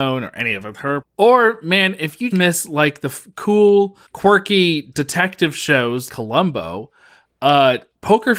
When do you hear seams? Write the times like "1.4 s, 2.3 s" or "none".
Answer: 1.0 s, 2.3 s, 4.1 s, 6.1 s